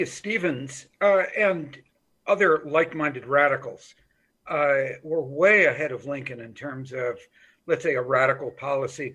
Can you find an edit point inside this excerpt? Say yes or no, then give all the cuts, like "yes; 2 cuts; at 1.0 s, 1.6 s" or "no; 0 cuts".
no; 0 cuts